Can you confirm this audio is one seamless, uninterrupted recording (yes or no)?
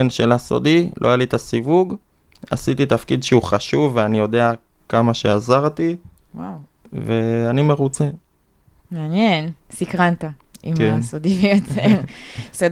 yes